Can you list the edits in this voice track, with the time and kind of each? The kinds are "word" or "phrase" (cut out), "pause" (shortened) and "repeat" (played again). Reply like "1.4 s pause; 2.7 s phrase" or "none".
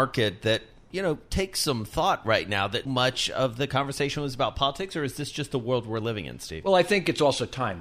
2.8 s word